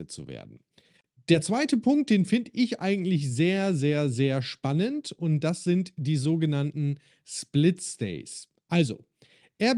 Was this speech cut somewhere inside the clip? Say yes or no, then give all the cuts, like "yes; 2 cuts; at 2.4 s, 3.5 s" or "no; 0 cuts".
no; 0 cuts